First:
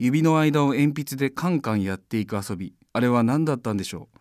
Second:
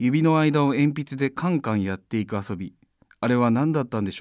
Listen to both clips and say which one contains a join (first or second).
first